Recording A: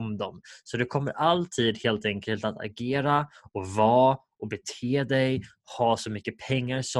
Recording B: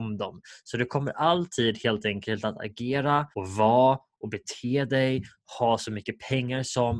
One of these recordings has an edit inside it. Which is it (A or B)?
B